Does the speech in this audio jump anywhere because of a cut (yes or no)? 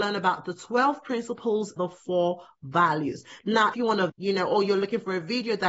yes